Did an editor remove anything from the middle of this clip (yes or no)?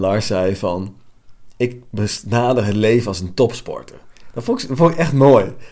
no